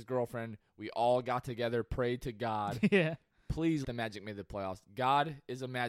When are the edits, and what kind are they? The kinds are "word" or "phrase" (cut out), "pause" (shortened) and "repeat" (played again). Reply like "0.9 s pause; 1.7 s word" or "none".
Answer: 3.8 s word